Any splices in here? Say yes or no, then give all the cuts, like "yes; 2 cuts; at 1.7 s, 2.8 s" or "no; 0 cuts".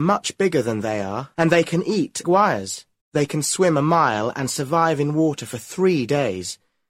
yes; 3 cuts; at 1.3 s, 2.2 s, 3.0 s